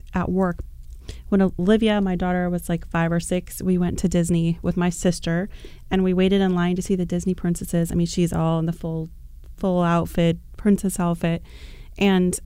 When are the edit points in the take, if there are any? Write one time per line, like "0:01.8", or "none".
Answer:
none